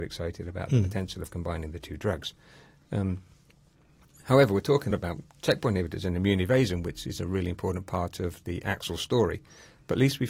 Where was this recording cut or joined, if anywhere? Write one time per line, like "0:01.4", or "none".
0:04.9